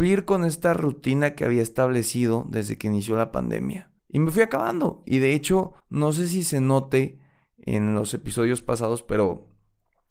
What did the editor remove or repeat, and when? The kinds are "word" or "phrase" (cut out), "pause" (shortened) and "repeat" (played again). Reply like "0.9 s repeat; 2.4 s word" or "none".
4.0 s pause; 5.8 s pause